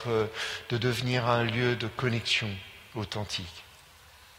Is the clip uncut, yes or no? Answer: yes